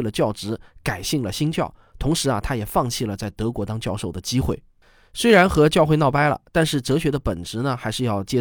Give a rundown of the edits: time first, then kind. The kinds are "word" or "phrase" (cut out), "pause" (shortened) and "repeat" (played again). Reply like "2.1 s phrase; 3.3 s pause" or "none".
none